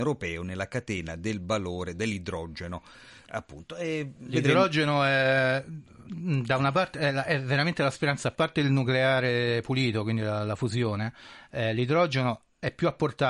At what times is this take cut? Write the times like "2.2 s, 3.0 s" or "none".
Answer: none

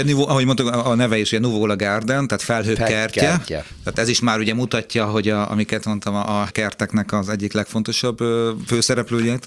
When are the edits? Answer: 6.5 s

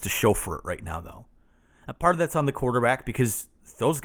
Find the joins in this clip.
none

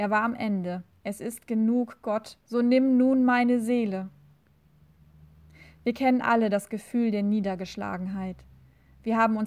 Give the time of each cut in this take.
0.9 s, 2.4 s

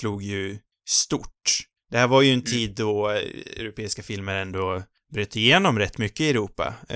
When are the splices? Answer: none

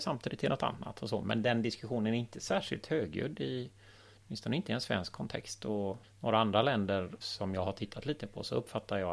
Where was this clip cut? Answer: 6.0 s, 7.2 s

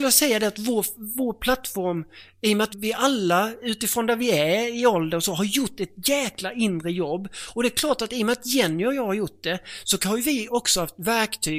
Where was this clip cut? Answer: 2.7 s

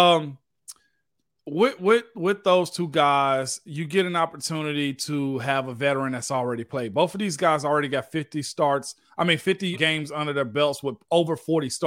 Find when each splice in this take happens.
9.7 s

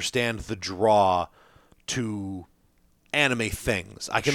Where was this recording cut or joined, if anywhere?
none

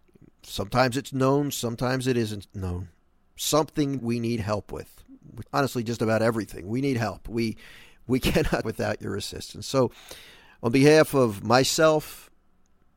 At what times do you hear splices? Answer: 4.0 s, 5.5 s, 8.6 s

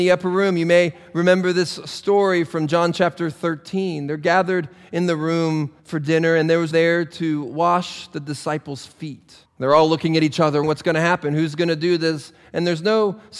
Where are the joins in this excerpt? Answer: 5.8 s, 6.7 s, 9.5 s, 10.6 s

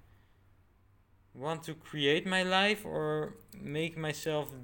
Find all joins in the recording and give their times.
none

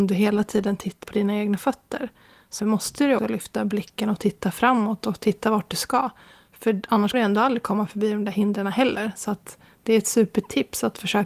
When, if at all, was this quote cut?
1.0 s, 2.6 s, 3.2 s, 7.1 s

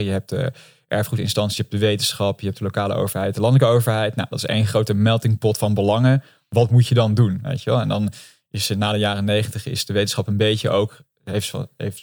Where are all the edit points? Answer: none

